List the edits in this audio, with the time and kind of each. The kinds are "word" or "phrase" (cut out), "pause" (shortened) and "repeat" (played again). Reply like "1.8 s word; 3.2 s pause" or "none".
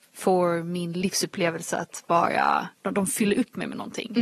2.8 s pause